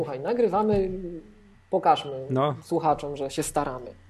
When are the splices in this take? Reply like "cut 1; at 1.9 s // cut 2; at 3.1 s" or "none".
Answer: none